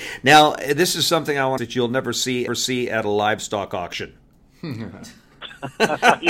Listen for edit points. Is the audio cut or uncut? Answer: cut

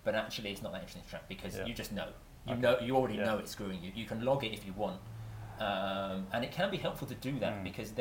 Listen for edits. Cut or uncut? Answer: uncut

